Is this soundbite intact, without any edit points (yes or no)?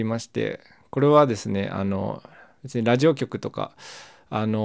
yes